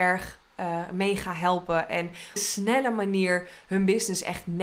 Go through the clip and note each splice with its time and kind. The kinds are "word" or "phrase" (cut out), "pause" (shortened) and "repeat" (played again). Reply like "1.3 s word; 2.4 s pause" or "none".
2.4 s phrase